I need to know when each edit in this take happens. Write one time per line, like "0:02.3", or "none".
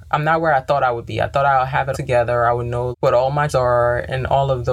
0:01.9
0:02.9
0:03.5